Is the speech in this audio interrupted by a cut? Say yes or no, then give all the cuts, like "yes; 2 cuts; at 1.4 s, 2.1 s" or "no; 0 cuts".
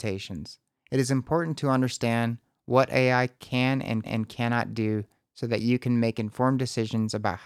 yes; 1 cut; at 4.0 s